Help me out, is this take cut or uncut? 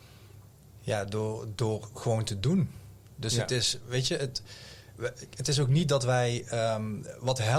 uncut